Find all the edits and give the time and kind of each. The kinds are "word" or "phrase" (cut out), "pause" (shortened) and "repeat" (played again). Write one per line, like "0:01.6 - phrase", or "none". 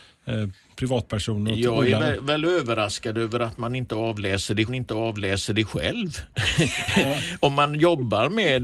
0:04.7 - repeat

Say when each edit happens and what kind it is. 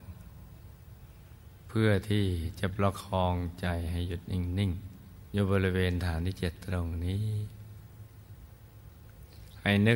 0:05.3 - word

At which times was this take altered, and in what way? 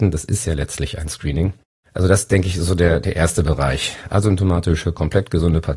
none

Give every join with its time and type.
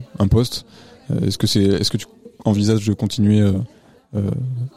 none

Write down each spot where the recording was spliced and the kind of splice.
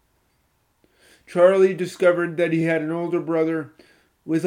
none

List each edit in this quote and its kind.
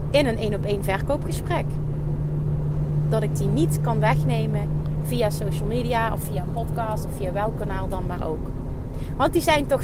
none

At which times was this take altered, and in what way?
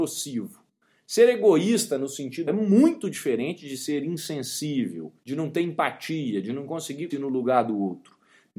0:02.5 - word
0:05.2 - pause
0:07.1 - word

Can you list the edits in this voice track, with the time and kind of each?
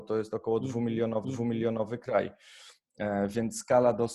0:01.2 - repeat

